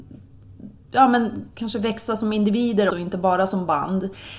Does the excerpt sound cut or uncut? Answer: cut